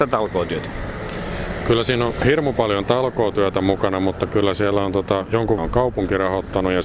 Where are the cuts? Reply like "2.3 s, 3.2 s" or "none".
5.6 s